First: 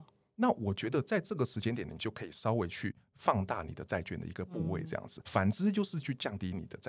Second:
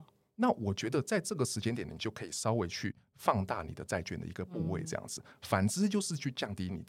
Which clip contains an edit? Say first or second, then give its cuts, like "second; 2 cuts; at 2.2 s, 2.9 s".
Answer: first; 1 cut; at 5.2 s